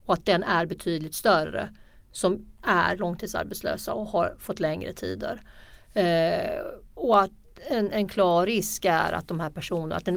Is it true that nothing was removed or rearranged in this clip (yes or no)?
yes